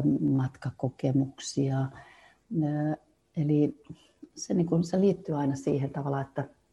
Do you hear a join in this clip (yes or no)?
no